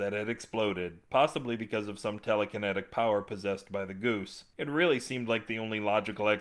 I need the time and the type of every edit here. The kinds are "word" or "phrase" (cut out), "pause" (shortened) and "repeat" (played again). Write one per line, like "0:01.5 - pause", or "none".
none